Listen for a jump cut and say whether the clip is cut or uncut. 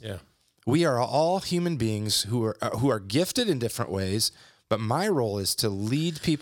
uncut